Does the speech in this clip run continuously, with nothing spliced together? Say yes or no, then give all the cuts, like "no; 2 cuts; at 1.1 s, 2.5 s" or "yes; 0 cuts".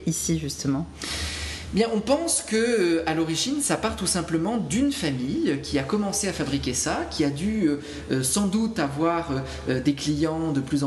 yes; 0 cuts